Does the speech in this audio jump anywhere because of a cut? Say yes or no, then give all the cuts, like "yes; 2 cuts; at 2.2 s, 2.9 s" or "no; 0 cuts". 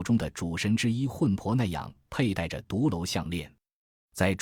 no; 0 cuts